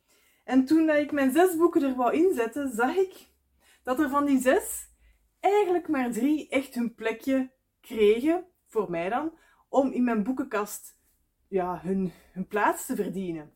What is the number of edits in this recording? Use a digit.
0